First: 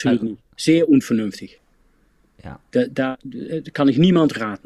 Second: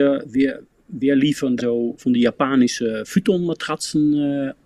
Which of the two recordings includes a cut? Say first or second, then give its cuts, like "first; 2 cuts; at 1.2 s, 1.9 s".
second; 2 cuts; at 1.6 s, 2.0 s